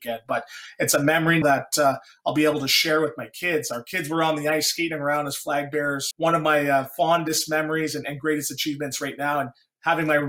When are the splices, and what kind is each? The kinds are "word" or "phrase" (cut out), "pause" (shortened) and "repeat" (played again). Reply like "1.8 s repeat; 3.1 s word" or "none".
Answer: 1.4 s word; 6.1 s word